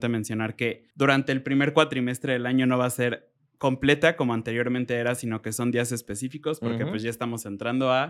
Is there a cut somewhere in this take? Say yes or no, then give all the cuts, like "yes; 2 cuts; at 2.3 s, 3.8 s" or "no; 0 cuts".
yes; 1 cut; at 0.9 s